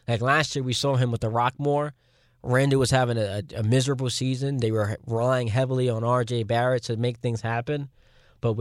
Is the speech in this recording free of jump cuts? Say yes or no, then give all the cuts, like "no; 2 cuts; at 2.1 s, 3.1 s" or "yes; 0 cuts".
yes; 0 cuts